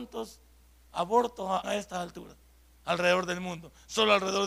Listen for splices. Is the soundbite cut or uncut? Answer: cut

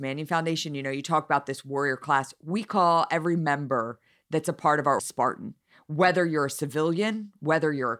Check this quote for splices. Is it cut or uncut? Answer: cut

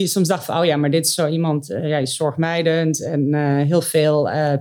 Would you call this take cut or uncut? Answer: uncut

